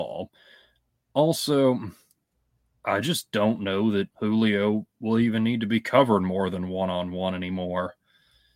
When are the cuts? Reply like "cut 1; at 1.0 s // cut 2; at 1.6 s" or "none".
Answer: cut 1; at 4.1 s